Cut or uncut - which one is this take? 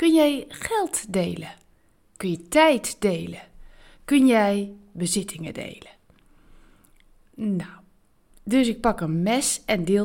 uncut